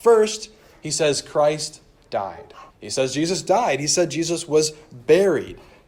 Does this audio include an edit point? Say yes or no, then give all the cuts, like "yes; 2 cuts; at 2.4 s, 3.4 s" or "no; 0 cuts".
yes; 1 cut; at 2.7 s